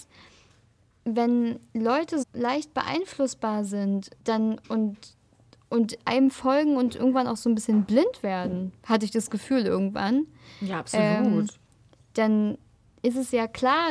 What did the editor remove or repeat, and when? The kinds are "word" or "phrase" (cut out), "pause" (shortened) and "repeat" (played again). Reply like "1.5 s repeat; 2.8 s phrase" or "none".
2.2 s word; 4.2 s pause